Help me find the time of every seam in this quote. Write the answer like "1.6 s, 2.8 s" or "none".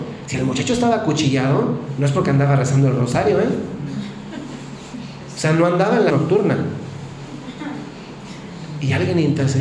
6.1 s

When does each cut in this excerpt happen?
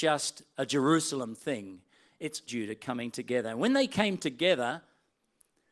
2.5 s

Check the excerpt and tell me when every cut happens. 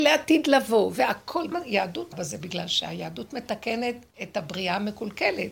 1.5 s, 2.1 s, 4.1 s

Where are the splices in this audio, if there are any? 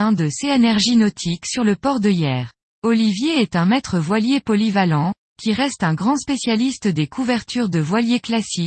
2.6 s

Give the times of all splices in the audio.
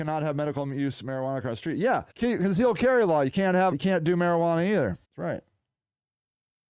2.1 s, 3.7 s, 5.0 s

